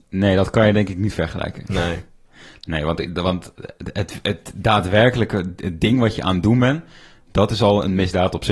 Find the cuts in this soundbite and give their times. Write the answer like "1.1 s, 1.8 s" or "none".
none

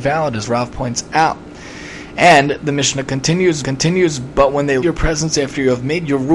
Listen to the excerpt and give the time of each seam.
3.6 s, 4.8 s

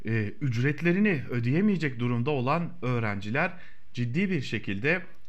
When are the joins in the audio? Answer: none

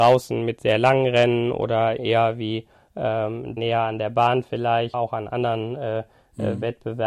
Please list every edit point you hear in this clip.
2.0 s, 3.6 s, 4.9 s

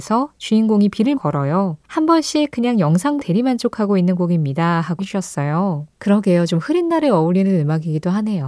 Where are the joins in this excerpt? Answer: 1.1 s, 1.8 s, 3.2 s, 5.0 s, 5.9 s

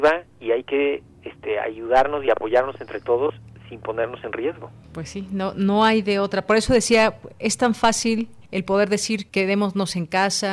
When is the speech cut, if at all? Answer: 4.8 s, 8.4 s, 9.3 s

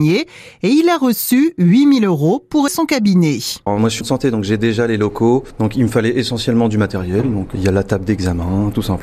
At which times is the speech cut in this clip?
2.7 s, 4.0 s, 7.5 s

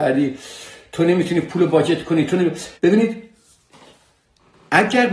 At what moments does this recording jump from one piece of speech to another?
2.7 s

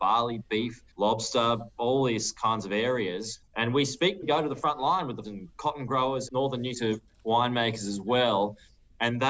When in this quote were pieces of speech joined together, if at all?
0.9 s, 3.5 s, 4.2 s, 5.2 s, 6.3 s, 6.7 s

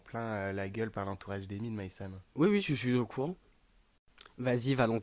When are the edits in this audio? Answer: 2.3 s

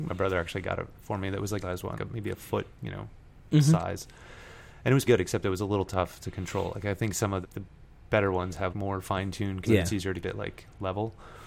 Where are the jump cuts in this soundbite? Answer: 1.6 s, 2.0 s, 2.8 s, 5.1 s, 7.4 s, 8.7 s, 9.6 s, 10.2 s

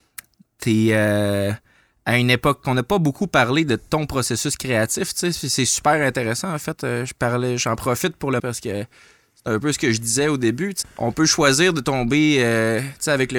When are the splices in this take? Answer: 2.6 s, 8.4 s, 10.8 s

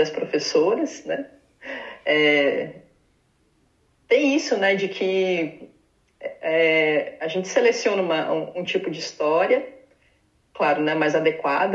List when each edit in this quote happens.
none

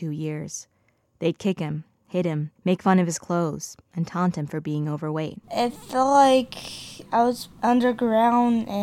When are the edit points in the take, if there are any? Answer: 2.6 s, 5.4 s, 7.5 s

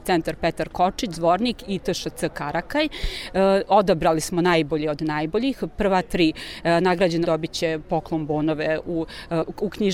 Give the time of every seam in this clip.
7.2 s

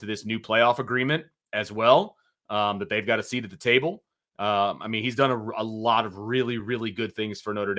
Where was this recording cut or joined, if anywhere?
none

